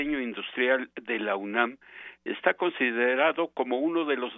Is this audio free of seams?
yes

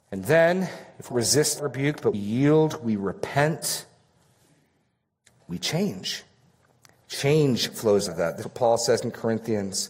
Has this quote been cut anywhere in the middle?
yes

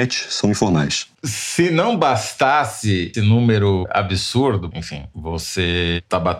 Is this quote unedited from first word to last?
no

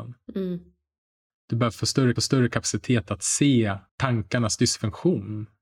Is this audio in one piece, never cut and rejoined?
no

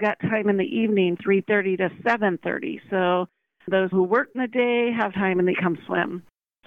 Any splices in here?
yes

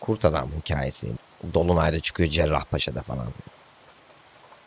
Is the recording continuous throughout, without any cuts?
yes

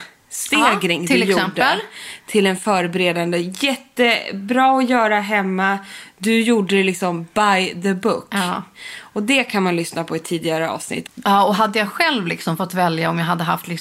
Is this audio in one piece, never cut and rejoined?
no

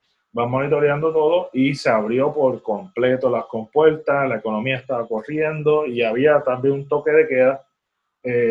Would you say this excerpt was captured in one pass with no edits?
yes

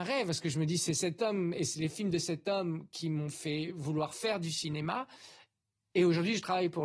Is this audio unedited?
yes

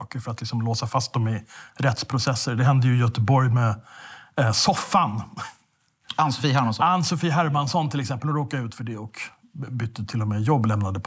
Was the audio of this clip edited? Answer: no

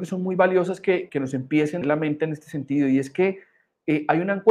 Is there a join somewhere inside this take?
yes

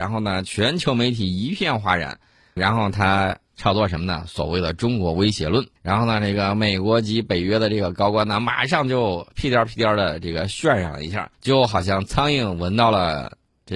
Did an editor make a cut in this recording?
yes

